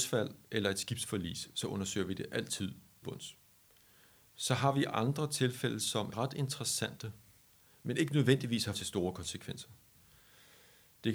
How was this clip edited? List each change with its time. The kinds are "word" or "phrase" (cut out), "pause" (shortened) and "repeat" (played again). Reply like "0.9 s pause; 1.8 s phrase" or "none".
3.0 s word; 6.1 s word; 8.7 s word